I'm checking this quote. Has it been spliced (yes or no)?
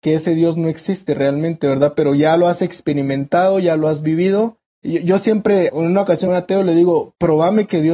yes